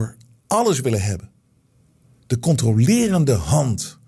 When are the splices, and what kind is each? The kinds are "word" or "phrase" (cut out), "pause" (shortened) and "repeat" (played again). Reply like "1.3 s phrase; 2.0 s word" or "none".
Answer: none